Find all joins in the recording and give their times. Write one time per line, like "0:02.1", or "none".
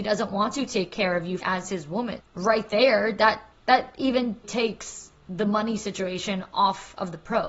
0:01.4
0:02.2
0:03.5
0:04.4